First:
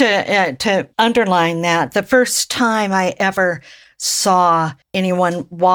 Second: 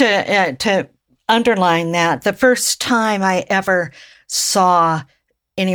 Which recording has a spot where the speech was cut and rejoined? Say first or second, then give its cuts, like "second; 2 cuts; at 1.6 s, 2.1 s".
first; 2 cuts; at 0.9 s, 4.8 s